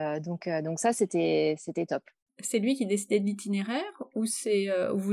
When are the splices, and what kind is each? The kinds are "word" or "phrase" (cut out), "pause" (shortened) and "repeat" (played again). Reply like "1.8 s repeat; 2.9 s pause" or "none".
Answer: none